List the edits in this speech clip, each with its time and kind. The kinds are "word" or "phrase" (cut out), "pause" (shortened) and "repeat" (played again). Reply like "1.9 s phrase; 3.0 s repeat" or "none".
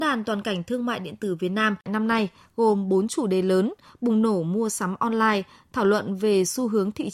none